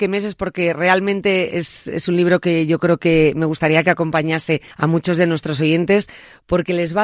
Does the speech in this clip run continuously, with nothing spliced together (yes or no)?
no